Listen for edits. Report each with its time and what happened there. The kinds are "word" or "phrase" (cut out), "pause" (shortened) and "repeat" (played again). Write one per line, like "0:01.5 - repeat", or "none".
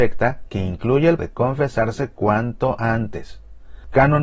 0:01.2 - word